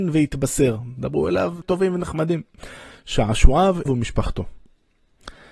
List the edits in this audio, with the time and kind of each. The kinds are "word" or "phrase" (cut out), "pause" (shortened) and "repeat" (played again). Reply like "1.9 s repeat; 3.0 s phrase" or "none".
1.6 s word; 3.9 s word